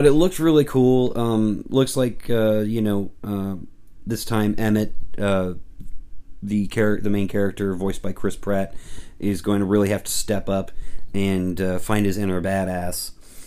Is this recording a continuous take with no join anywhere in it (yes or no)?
yes